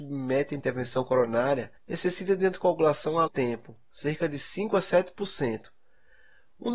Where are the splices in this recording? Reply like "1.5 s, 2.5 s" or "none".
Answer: 1.8 s, 3.3 s